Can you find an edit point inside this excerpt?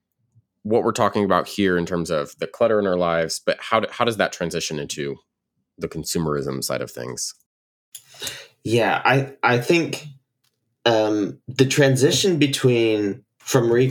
no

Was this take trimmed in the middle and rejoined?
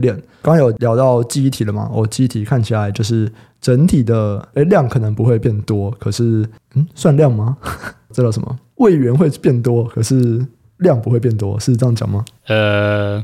no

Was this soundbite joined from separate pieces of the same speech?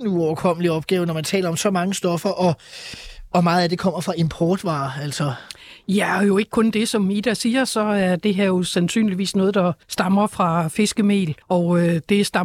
yes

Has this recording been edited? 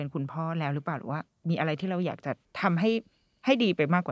yes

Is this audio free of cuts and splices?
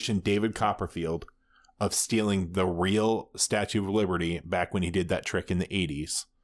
yes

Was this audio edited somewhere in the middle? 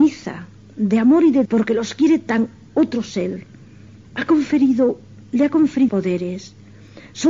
yes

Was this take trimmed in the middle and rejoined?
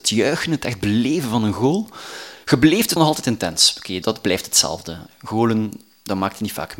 yes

